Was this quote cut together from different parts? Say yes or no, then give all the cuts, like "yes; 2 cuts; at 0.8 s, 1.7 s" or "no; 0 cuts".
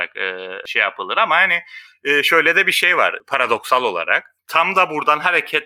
no; 0 cuts